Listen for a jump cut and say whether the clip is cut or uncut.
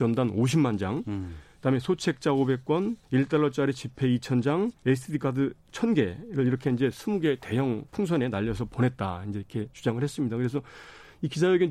cut